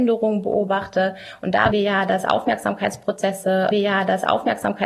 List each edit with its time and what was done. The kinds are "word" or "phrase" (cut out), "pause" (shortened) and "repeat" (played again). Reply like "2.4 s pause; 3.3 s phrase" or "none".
1.7 s word; 3.7 s repeat